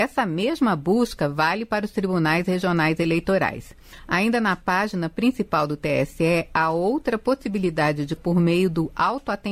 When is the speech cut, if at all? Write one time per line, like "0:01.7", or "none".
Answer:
0:08.2

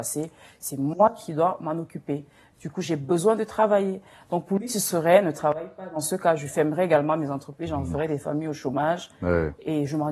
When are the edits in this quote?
none

